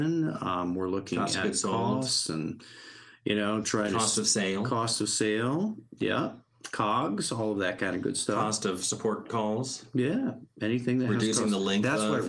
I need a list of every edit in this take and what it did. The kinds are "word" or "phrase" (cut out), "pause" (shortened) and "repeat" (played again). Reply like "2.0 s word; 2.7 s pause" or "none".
none